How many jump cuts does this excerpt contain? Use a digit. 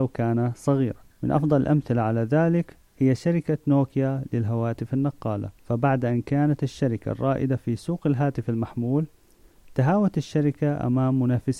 3